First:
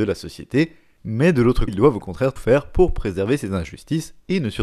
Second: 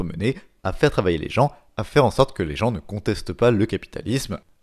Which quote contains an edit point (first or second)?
first